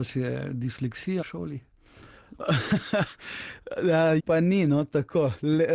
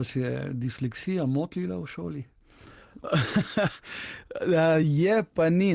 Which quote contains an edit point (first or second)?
first